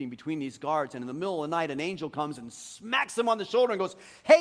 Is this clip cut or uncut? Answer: uncut